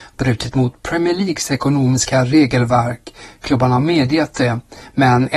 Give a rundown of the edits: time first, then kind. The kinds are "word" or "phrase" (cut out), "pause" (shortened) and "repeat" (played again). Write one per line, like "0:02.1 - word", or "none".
none